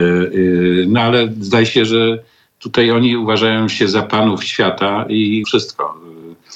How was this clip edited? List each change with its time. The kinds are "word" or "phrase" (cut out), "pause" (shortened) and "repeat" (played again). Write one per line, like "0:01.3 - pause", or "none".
0:05.4 - word